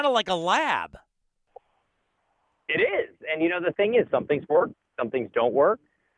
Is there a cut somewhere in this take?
no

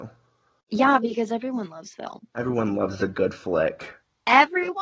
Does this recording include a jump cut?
yes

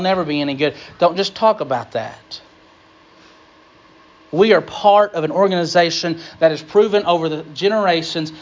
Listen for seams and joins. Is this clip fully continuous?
yes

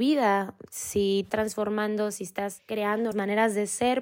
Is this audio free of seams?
no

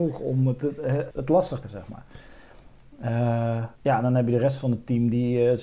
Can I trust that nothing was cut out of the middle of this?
no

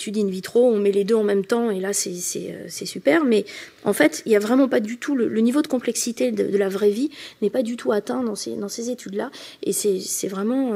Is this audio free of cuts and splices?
yes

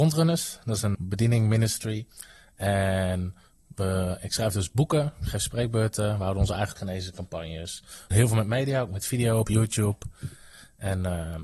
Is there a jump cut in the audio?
yes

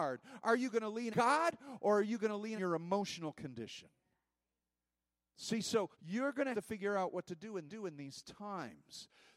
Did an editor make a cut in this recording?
yes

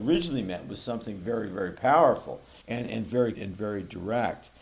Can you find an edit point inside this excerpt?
yes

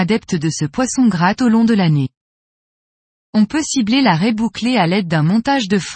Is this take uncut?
no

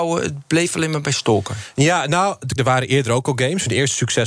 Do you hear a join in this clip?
yes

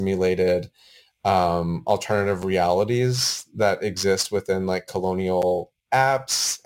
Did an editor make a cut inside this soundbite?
no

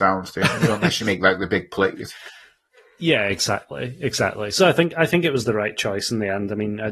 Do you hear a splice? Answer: no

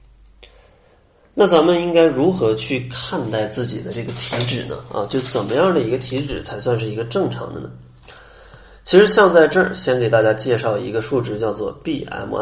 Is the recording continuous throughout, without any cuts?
yes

